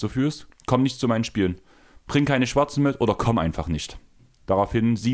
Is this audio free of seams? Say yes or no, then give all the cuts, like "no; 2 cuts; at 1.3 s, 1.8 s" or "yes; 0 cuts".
yes; 0 cuts